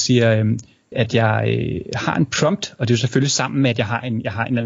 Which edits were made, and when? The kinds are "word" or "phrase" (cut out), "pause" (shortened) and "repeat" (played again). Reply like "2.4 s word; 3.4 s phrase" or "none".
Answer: 0.9 s word